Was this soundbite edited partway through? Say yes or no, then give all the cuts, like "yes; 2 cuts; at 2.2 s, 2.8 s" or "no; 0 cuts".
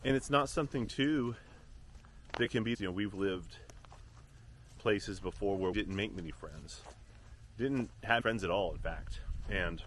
yes; 4 cuts; at 2.7 s, 4.8 s, 5.7 s, 8.2 s